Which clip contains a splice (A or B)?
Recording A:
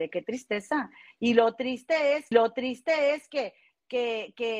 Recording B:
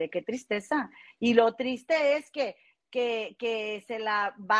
A